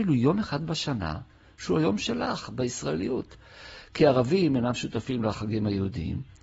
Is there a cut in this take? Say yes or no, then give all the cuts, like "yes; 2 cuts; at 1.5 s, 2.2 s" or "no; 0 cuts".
no; 0 cuts